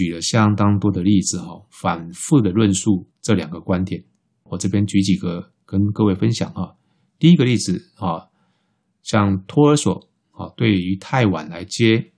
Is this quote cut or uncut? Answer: uncut